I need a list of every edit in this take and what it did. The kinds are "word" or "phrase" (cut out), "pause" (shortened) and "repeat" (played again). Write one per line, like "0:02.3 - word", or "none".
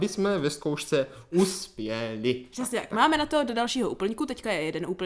none

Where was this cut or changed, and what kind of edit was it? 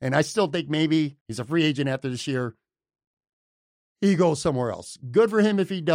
0:01.2 - pause

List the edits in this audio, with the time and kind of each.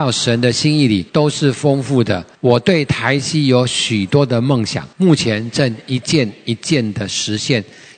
0:01.1 - pause
0:02.3 - pause
0:04.9 - pause

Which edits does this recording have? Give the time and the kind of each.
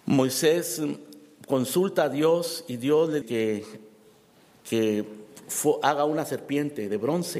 0:03.2 - word

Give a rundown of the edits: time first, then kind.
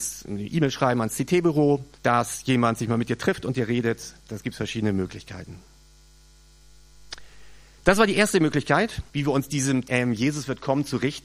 0:01.9 - pause
0:09.1 - pause
0:09.8 - word

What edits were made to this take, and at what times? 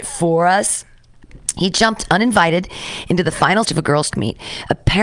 0:03.6 - word
0:04.1 - word

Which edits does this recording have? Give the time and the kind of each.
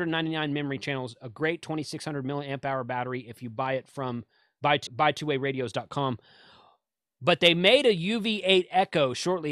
0:04.9 - word

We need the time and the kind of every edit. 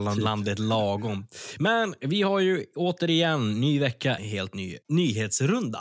0:04.2 - word

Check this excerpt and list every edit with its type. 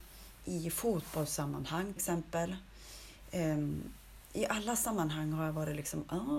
0:02.0 - word

